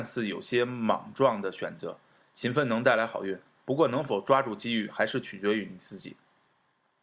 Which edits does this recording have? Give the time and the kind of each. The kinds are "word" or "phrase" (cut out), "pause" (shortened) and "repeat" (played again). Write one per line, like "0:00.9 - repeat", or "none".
none